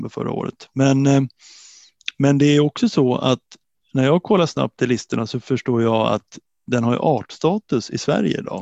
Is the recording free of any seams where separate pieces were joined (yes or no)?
yes